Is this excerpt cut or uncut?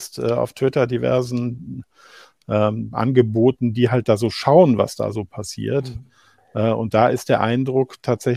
uncut